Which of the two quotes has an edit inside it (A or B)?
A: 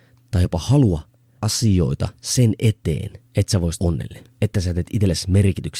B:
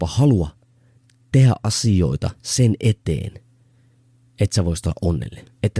A